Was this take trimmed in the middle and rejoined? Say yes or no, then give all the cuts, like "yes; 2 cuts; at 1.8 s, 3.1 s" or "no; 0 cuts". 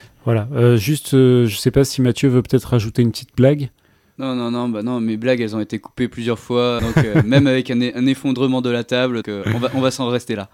yes; 2 cuts; at 6.8 s, 9.2 s